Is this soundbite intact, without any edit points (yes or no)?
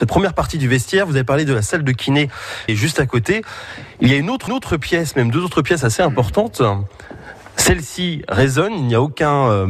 no